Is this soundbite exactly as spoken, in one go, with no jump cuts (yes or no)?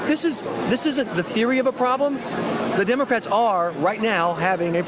no